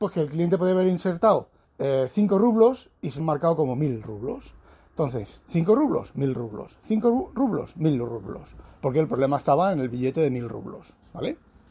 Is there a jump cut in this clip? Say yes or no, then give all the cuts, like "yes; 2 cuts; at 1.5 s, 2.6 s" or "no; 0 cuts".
yes; 3 cuts; at 1.6 s, 3.2 s, 5.4 s